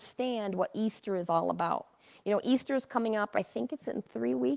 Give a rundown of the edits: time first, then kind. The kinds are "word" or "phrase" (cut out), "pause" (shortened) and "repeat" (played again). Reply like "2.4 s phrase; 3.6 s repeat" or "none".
none